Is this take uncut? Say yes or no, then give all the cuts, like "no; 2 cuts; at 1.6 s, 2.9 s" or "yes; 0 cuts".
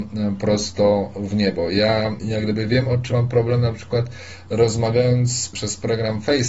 no; 1 cut; at 3.1 s